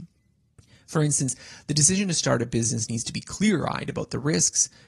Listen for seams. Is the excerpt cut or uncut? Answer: uncut